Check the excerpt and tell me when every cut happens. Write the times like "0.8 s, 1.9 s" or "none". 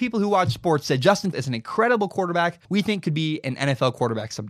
1.3 s, 2.6 s